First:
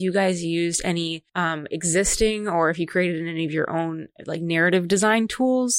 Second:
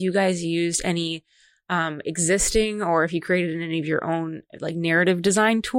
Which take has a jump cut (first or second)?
first